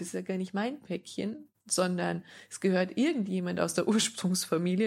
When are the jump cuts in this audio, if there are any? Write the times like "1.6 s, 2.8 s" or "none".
none